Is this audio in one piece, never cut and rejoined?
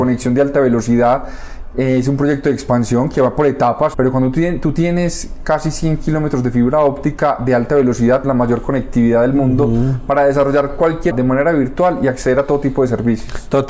no; 3 cuts; at 3.9 s, 8.2 s, 11.1 s

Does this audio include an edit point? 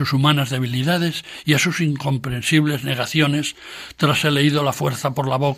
yes; 1 cut; at 4.2 s

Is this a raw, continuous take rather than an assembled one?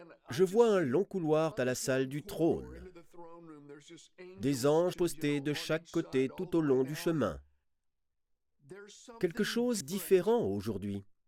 no; 3 cuts; at 1.5 s, 4.9 s, 9.8 s

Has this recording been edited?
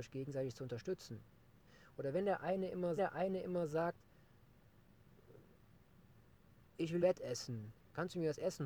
yes; 2 cuts; at 3.0 s, 7.0 s

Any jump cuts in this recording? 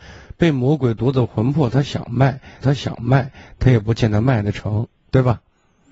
yes; 1 cut; at 2.6 s

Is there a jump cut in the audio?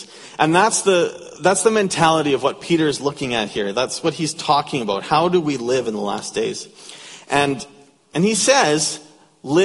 no; 0 cuts

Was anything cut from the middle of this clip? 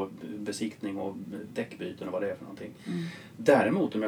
no; 0 cuts

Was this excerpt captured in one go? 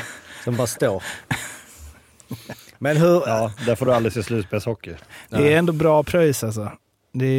yes; 0 cuts

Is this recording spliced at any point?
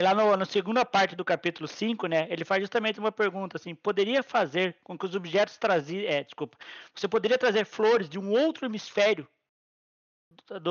no; 0 cuts

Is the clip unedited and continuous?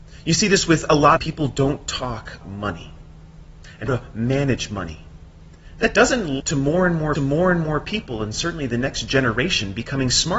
no; 5 cuts; at 1.2 s, 2.4 s, 3.9 s, 6.4 s, 7.2 s

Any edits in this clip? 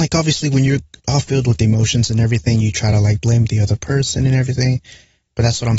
no; 0 cuts

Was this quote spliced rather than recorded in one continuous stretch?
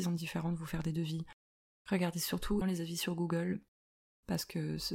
yes; 1 cut; at 2.6 s

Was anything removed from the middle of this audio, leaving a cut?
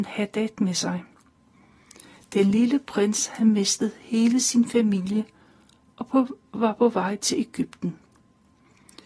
no; 0 cuts

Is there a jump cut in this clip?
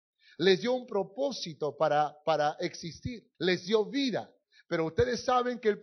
yes; 1 cut; at 3.3 s

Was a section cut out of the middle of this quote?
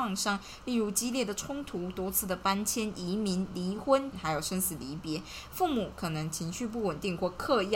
yes; 1 cut; at 4.1 s

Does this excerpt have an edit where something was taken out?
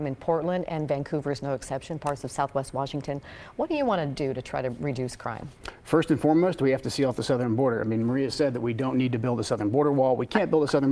no; 0 cuts

